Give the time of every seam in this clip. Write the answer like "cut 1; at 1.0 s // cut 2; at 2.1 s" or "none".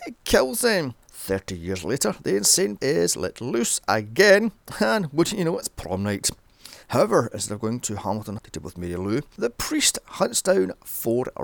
cut 1; at 1.0 s // cut 2; at 2.8 s // cut 3; at 6.8 s // cut 4; at 8.4 s

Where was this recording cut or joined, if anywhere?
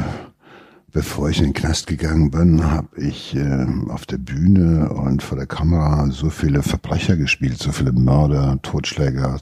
none

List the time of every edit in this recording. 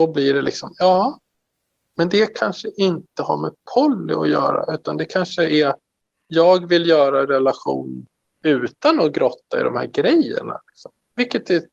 cut 1; at 8.2 s

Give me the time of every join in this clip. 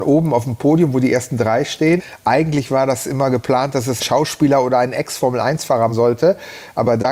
cut 1; at 4.0 s // cut 2; at 5.9 s

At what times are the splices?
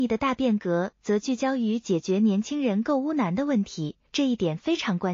cut 1; at 4.1 s

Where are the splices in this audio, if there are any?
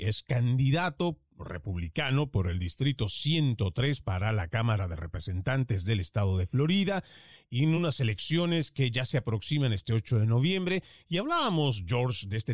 none

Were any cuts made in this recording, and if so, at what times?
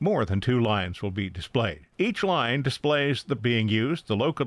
cut 1; at 1.9 s // cut 2; at 3.4 s

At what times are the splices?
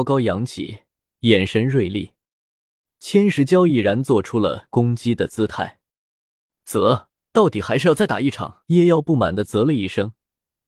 cut 1; at 7.1 s // cut 2; at 8.6 s

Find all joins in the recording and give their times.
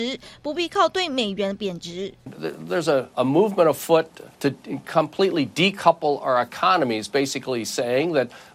cut 1; at 4.3 s

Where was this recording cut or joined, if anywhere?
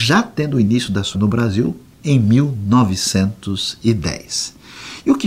cut 1; at 1.1 s // cut 2; at 1.9 s

